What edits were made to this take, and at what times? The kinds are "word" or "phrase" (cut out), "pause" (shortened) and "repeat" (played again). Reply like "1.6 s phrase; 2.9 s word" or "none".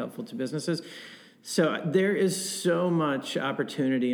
none

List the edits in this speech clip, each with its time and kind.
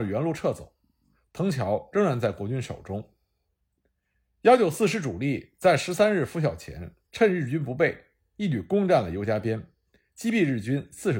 7.0 s pause

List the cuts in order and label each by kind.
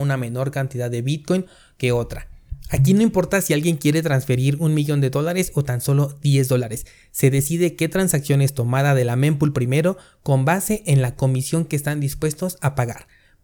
none

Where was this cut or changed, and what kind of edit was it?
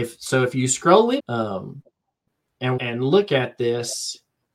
1.2 s word; 2.8 s word

